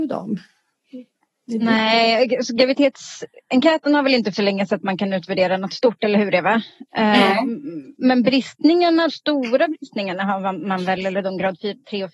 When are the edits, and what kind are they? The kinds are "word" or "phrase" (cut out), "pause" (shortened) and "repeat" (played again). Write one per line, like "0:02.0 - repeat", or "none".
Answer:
0:04.3 - word
0:08.0 - word
0:09.1 - word